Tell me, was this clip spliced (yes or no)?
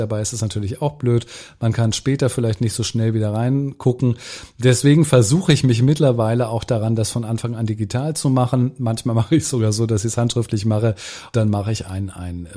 yes